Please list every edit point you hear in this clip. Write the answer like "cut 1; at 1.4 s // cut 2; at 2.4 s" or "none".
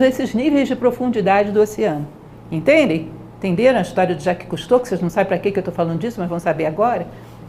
cut 1; at 3.3 s